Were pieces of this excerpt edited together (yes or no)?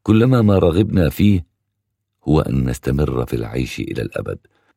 no